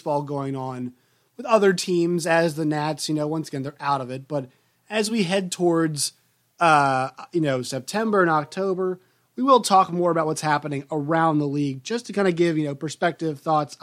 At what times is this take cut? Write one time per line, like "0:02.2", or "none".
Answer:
none